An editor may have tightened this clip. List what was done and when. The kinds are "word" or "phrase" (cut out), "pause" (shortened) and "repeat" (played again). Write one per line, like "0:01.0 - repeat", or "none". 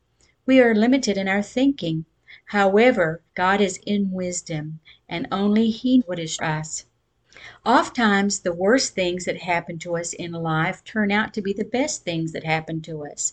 0:03.3 - pause
0:03.8 - word
0:06.0 - word
0:06.4 - phrase